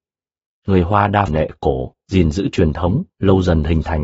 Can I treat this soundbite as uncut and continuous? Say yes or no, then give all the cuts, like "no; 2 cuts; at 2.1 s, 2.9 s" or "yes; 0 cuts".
no; 3 cuts; at 1.3 s, 2.0 s, 3.1 s